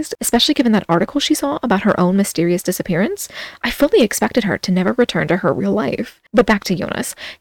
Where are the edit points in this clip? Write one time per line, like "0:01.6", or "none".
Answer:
0:06.3